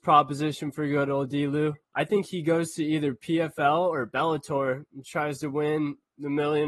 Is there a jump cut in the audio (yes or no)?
yes